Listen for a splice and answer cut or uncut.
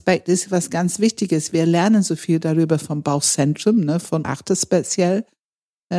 cut